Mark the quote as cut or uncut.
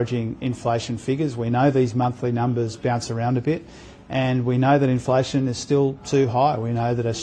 uncut